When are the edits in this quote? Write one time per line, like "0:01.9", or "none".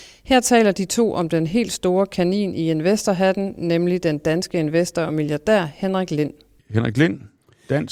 none

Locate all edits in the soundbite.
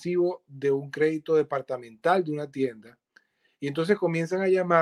none

